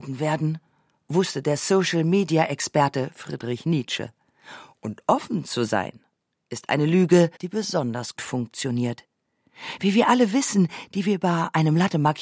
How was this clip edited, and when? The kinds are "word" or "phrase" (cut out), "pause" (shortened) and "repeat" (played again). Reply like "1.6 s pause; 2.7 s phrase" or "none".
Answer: 7.4 s pause; 8.2 s word